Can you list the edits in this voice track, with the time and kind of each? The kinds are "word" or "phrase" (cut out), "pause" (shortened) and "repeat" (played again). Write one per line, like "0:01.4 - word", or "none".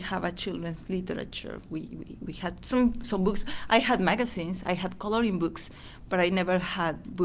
none